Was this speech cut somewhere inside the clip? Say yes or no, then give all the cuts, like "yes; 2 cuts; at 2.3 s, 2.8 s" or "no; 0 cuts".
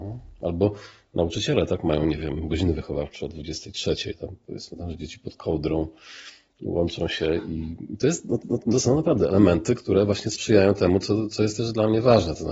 yes; 1 cut; at 8.4 s